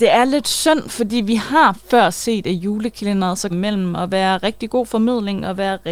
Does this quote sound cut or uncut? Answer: cut